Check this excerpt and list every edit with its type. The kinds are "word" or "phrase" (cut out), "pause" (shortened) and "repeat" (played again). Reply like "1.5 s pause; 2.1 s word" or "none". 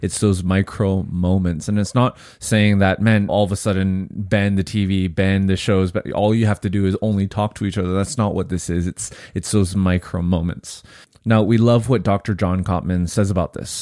3.3 s word